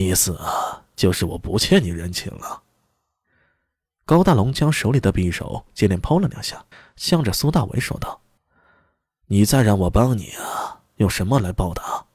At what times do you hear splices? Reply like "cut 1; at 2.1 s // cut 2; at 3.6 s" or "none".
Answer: cut 1; at 6.7 s // cut 2; at 8.4 s